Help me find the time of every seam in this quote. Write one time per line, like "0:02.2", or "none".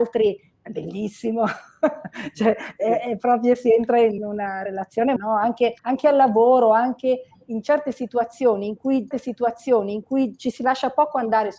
0:04.2
0:05.2
0:05.8
0:09.1

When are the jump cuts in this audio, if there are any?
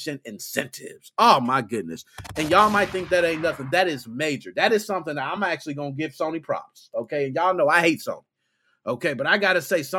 none

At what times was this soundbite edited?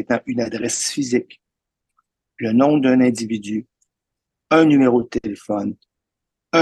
none

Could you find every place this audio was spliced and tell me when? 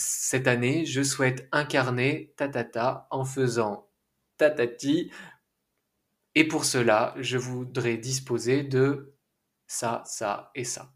none

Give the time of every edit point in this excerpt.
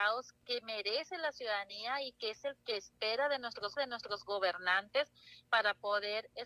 0:03.8

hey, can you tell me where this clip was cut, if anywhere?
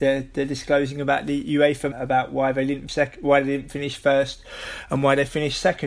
0:01.9
0:02.9

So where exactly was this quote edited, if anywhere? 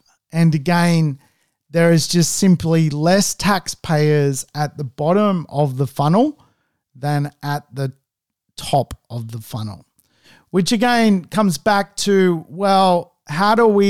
none

